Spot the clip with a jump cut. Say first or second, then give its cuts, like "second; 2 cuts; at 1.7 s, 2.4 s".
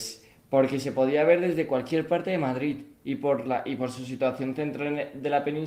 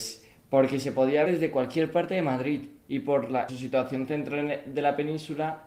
second; 2 cuts; at 1.2 s, 3.5 s